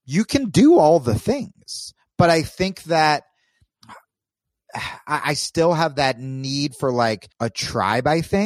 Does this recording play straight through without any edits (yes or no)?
no